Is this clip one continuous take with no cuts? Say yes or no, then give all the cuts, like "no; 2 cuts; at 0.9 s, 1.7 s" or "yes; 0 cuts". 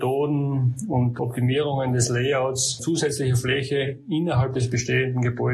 yes; 0 cuts